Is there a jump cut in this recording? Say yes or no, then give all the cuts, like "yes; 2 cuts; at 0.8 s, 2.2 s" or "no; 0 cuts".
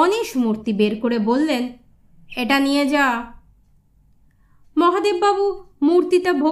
no; 0 cuts